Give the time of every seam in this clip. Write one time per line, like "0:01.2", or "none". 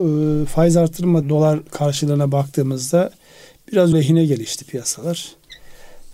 0:01.2
0:03.9

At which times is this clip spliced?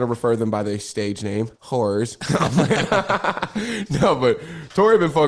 0:01.5

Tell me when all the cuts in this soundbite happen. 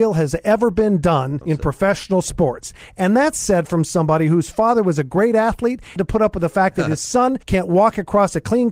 0:01.4
0:06.0
0:07.4

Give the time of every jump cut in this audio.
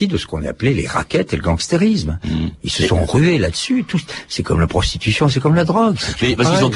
none

